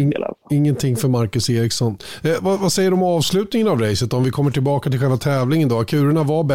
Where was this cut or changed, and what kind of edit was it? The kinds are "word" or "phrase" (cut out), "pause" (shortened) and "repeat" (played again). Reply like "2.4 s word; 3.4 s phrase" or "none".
none